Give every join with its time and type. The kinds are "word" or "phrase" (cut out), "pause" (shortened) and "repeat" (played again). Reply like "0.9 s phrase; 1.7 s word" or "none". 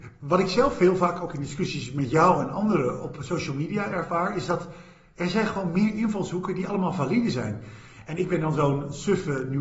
none